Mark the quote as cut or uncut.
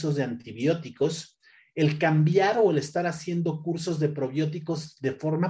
uncut